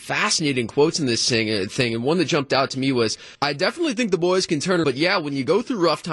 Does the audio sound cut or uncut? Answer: cut